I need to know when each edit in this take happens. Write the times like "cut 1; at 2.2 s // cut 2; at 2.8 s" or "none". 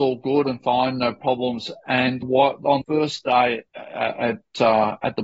cut 1; at 2.2 s // cut 2; at 2.8 s // cut 3; at 3.7 s

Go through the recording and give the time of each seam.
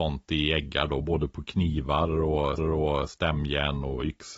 cut 1; at 2.6 s

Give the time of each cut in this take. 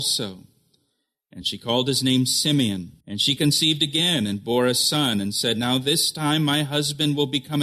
cut 1; at 3.0 s

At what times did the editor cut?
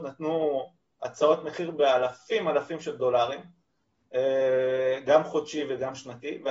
none

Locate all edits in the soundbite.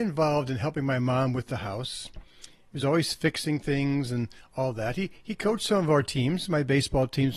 none

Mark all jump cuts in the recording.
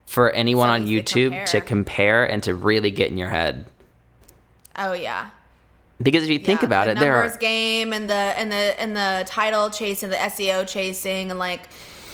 none

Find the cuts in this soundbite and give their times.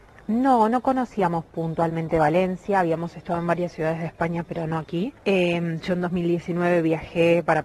cut 1; at 5.2 s

